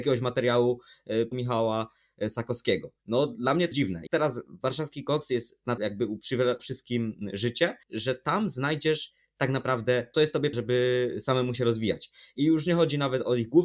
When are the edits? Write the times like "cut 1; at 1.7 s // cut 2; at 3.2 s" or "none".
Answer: cut 1; at 1.3 s // cut 2; at 3.0 s // cut 3; at 3.7 s // cut 4; at 4.1 s // cut 5; at 5.8 s // cut 6; at 6.6 s // cut 7; at 7.8 s // cut 8; at 10.1 s // cut 9; at 10.5 s